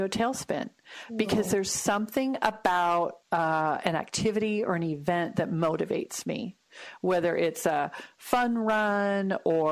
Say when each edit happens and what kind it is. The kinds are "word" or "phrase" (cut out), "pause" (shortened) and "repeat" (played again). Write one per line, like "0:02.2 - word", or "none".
0:03.2 - pause